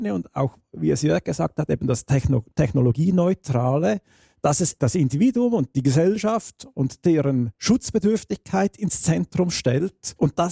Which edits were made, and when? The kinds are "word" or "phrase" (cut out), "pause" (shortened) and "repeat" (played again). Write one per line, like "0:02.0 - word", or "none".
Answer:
0:02.5 - pause
0:04.8 - word